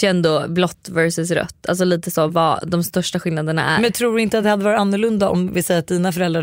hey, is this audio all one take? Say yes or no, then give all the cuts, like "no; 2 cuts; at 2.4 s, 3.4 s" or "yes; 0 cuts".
yes; 0 cuts